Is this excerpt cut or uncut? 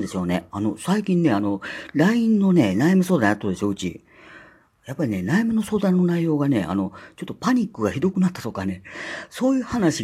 uncut